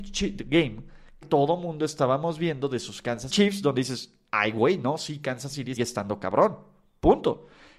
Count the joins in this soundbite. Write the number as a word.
three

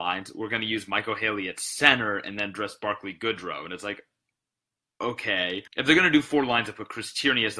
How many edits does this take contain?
one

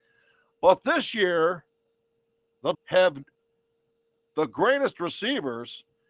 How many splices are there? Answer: one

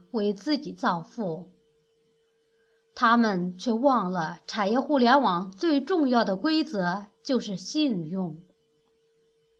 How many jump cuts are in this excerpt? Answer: zero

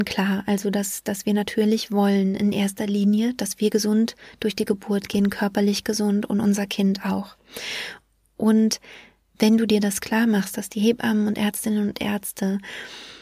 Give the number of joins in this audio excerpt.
zero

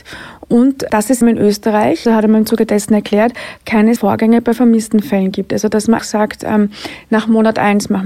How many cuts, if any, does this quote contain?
four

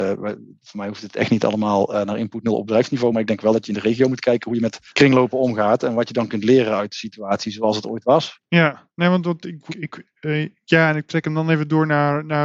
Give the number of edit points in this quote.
three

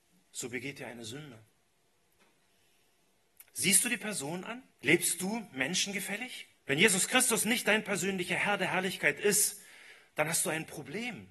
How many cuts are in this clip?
two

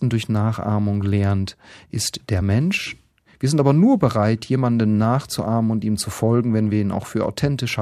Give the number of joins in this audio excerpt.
zero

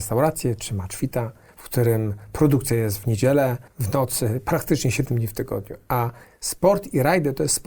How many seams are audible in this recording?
zero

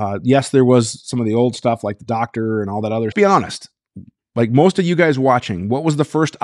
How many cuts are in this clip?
one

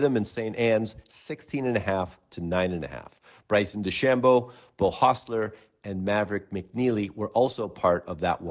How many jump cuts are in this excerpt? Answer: zero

